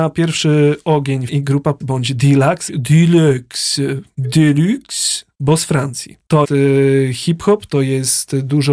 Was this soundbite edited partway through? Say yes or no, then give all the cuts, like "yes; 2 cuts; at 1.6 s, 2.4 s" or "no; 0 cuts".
yes; 5 cuts; at 1.3 s, 1.8 s, 2.7 s, 5.3 s, 6.4 s